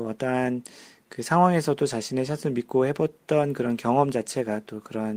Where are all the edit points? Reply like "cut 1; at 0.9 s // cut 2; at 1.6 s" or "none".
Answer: none